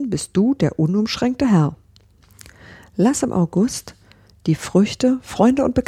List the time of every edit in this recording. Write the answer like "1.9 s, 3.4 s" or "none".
none